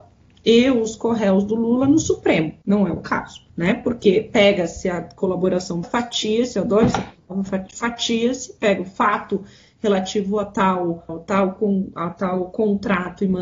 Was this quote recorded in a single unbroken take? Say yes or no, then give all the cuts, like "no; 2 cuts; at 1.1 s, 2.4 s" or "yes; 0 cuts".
no; 4 cuts; at 2.6 s, 3.5 s, 5.8 s, 11.1 s